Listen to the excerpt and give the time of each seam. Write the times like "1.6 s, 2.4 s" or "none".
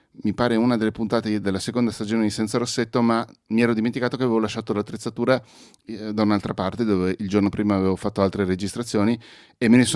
none